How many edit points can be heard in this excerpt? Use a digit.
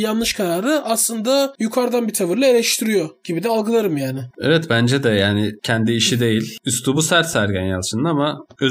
0